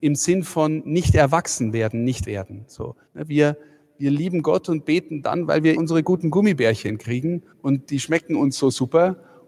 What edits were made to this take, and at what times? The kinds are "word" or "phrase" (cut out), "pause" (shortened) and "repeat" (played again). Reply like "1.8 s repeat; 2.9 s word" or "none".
2.2 s word; 3.1 s pause; 5.8 s word; 7.5 s pause